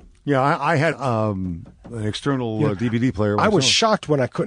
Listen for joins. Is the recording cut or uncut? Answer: cut